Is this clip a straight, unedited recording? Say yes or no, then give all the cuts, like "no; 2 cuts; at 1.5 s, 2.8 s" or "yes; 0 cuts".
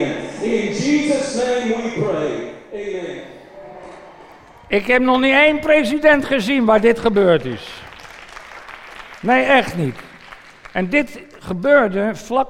yes; 0 cuts